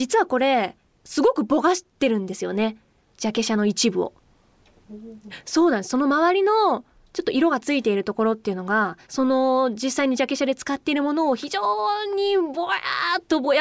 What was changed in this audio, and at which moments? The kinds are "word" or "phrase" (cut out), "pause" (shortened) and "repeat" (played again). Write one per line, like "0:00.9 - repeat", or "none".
0:09.0 - pause

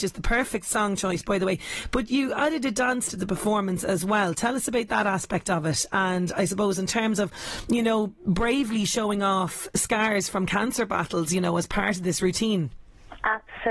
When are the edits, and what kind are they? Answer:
0:03.1 - word

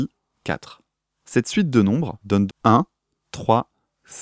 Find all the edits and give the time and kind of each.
0:02.5 - word

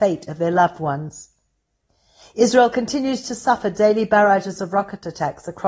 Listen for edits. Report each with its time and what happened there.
none

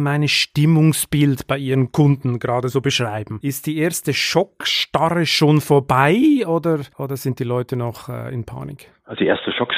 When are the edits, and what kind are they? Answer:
none

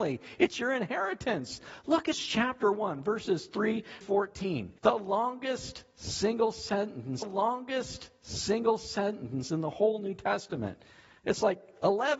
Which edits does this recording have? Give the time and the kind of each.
0:02.1 - word
0:04.0 - word
0:04.8 - pause
0:07.2 - repeat

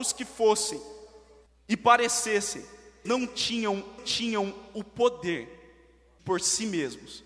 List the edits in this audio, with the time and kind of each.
0:01.5 - pause
0:03.0 - word
0:04.0 - repeat
0:06.2 - word

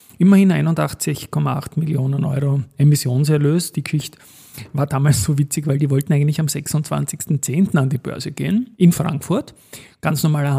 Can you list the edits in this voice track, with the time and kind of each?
0:08.7 - pause

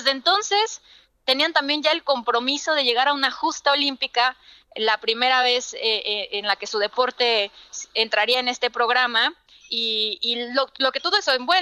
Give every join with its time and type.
none

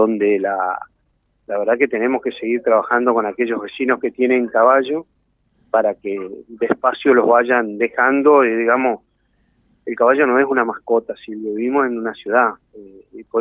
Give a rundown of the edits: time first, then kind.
none

